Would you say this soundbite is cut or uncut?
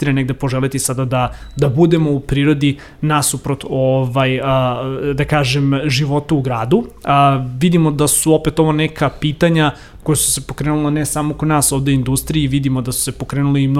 uncut